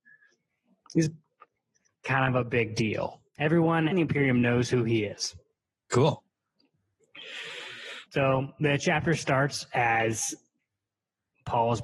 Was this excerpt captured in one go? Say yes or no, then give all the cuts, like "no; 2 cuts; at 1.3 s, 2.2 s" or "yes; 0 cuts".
no; 2 cuts; at 3.9 s, 8.1 s